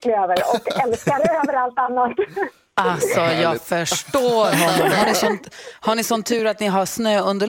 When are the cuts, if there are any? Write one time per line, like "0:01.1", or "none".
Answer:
none